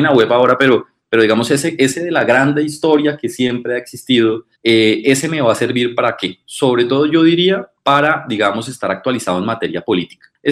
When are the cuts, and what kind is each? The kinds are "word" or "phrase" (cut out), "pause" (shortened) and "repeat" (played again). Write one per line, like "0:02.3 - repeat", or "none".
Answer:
0:04.5 - pause